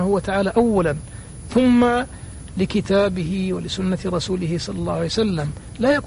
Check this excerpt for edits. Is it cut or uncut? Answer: uncut